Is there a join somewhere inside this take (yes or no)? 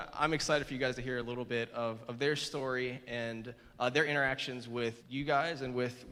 yes